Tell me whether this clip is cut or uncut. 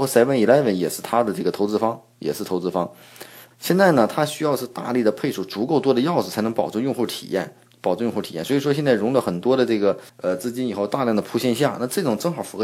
cut